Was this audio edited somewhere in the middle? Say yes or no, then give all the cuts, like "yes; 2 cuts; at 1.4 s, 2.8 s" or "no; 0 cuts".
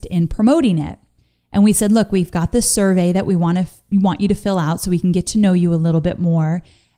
no; 0 cuts